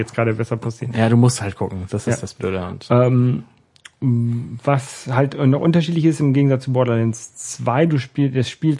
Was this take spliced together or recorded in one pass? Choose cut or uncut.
uncut